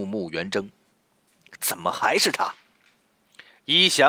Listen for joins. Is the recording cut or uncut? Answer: uncut